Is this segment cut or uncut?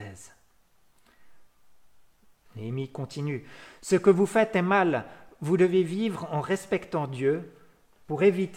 uncut